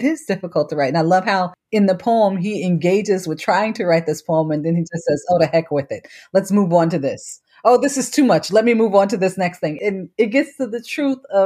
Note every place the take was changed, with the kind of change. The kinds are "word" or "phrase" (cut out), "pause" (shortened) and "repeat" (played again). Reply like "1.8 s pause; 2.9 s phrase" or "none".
none